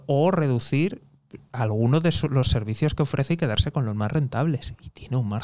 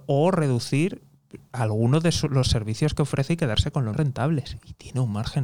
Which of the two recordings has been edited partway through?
second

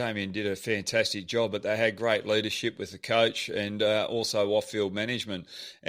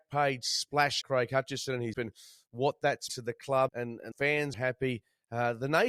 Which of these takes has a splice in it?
second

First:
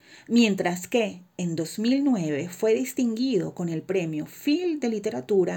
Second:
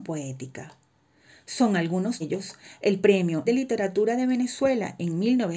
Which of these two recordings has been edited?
second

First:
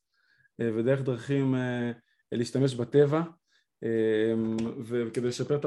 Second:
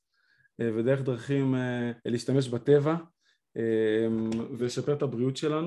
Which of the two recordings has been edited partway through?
second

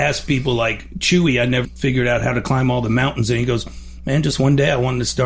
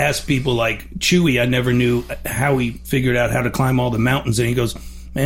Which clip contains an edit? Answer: first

